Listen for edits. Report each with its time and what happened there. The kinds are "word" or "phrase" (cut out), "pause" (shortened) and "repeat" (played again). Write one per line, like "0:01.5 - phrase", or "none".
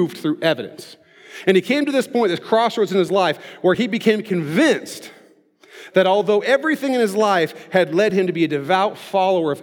none